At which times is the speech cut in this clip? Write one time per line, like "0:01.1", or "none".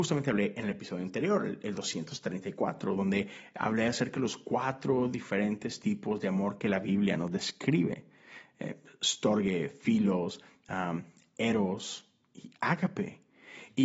none